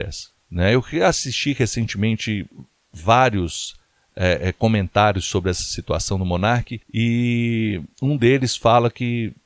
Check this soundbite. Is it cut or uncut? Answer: uncut